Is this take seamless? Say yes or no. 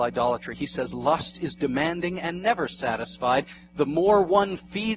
yes